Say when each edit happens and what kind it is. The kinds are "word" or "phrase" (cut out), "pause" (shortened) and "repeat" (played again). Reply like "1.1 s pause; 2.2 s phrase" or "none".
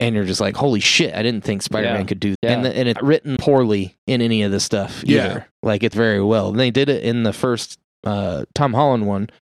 2.3 s word; 3.0 s word; 3.4 s word; 5.9 s word; 7.9 s word